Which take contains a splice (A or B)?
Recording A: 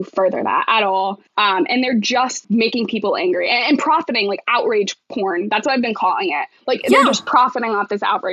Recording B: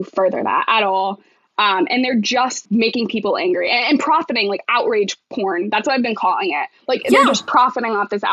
A